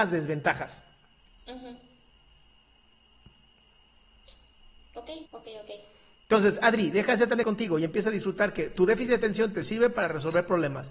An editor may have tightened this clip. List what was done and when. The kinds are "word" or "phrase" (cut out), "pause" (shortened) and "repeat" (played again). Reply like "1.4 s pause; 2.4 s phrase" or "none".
5.3 s pause; 7.4 s word